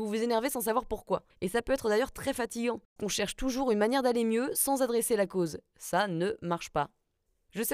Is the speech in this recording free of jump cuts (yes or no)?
no